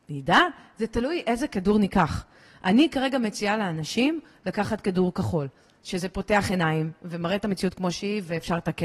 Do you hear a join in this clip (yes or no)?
no